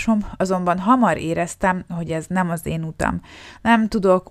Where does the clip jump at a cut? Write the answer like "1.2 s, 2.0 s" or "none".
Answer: none